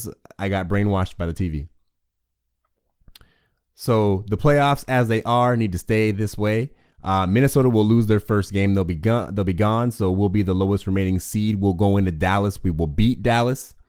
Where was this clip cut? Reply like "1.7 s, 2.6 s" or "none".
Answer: none